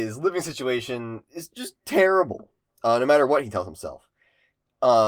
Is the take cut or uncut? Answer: uncut